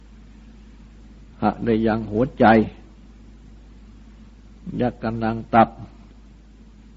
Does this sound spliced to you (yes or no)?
yes